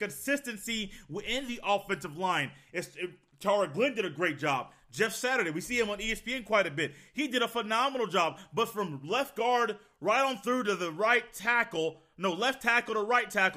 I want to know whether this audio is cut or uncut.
uncut